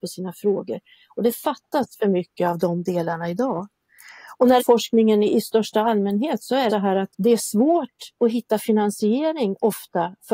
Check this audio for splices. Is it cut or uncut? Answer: cut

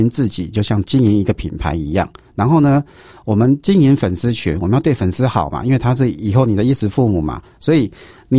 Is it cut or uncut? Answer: uncut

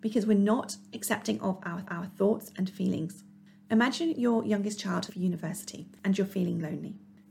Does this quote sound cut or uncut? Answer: cut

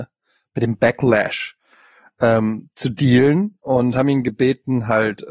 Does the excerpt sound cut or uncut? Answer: uncut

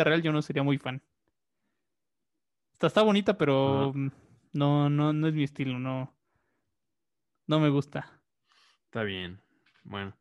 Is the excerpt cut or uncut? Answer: uncut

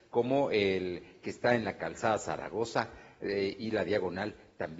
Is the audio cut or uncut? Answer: uncut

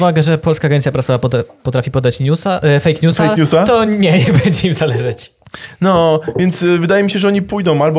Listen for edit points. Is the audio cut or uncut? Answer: uncut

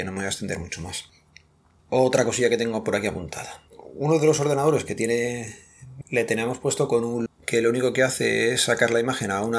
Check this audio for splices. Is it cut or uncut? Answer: cut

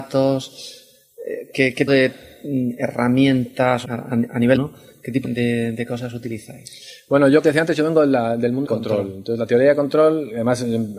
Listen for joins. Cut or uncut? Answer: cut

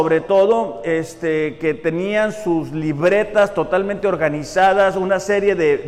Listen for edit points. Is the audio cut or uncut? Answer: uncut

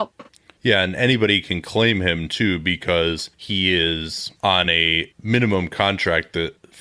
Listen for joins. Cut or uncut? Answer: uncut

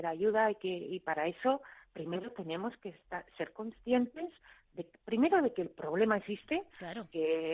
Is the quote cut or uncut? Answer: uncut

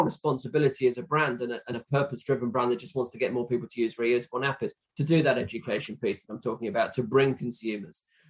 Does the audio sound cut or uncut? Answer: uncut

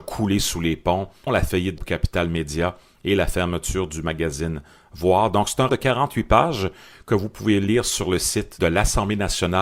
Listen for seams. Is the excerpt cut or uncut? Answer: cut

